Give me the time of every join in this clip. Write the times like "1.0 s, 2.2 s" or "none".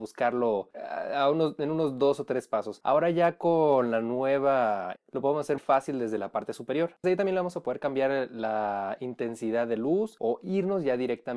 5.0 s, 5.6 s, 7.0 s

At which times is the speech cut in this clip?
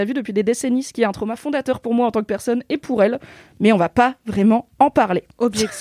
none

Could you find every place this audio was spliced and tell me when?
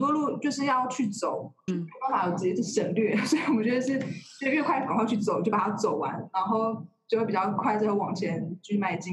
1.7 s

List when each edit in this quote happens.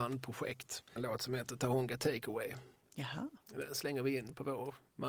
1.0 s

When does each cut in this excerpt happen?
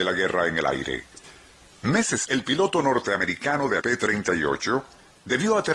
2.2 s, 3.8 s

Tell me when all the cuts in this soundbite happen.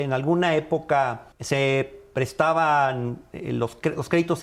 1.3 s

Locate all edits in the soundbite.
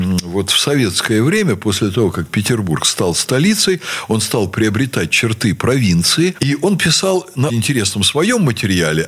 7.5 s

